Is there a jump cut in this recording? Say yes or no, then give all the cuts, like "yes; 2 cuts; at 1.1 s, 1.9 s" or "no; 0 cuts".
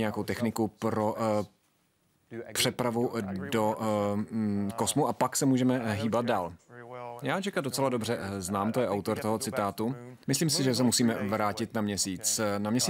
yes; 1 cut; at 10.2 s